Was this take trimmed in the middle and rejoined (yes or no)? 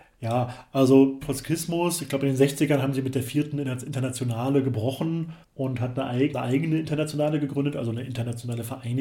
yes